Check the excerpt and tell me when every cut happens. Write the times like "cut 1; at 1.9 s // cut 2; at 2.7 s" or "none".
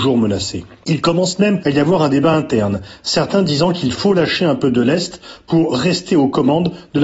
none